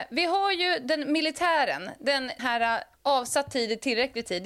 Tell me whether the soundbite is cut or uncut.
cut